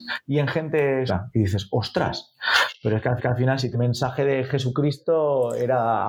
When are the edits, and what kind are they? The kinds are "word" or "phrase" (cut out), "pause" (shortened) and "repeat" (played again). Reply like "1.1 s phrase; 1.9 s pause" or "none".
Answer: 1.1 s word; 3.2 s repeat; 3.7 s phrase

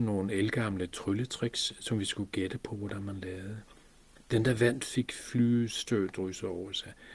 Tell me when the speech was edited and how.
none

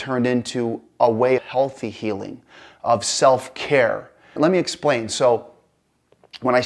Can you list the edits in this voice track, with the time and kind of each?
1.4 s word; 4.4 s word

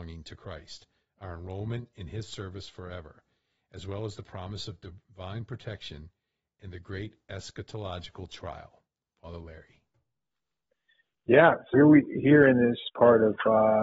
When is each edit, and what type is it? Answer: 11.7 s word

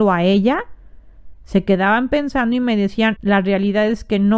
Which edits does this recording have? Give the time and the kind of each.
3.2 s word

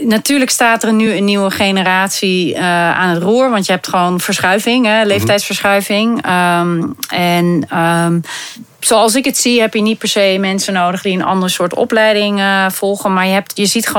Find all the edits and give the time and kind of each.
none

